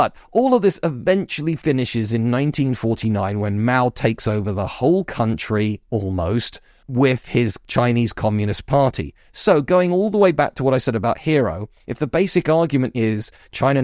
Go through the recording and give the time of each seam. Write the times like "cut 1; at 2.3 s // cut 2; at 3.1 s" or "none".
none